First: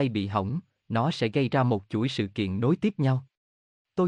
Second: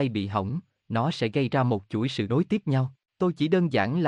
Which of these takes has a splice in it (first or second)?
second